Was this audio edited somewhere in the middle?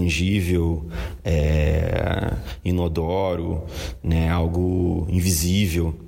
no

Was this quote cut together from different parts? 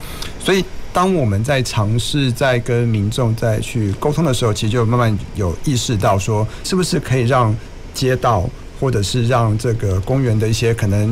yes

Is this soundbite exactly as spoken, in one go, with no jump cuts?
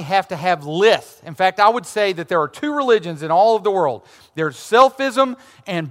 yes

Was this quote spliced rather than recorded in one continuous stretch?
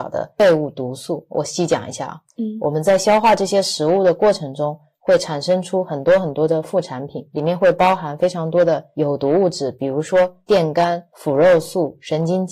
no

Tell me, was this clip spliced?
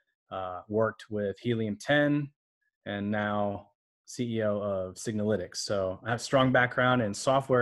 no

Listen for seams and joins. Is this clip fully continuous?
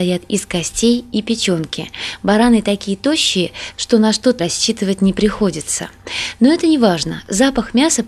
no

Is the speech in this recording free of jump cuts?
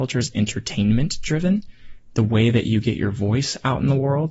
yes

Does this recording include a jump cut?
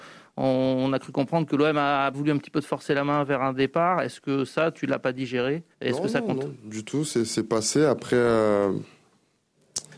yes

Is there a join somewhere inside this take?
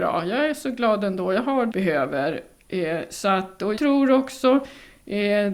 yes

